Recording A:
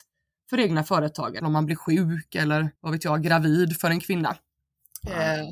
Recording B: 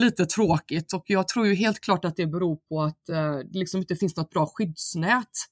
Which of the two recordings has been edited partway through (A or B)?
A